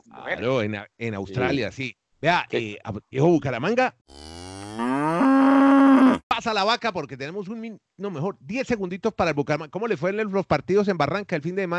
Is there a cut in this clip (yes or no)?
no